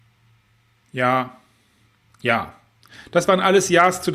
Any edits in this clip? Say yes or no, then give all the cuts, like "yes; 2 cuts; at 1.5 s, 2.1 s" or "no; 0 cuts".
yes; 1 cut; at 1.9 s